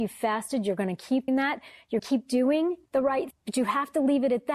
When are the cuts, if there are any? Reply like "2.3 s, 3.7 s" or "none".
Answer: 1.3 s, 2.0 s, 2.9 s, 3.3 s